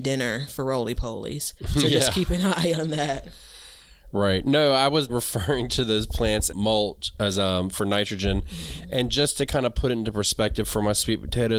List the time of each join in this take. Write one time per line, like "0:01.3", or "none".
0:01.6
0:05.1
0:06.5